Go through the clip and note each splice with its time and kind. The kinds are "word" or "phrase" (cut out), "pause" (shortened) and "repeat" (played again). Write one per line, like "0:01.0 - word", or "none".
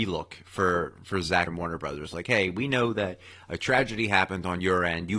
0:01.5 - word